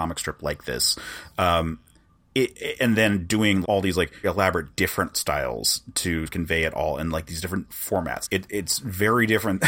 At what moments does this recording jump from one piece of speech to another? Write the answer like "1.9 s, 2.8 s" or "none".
2.8 s, 3.6 s, 4.2 s, 5.1 s, 6.2 s, 7.7 s, 8.2 s